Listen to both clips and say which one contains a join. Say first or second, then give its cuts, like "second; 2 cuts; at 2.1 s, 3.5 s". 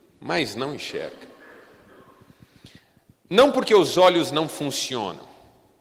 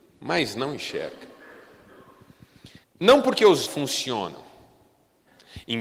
second; 2 cuts; at 2.8 s, 3.7 s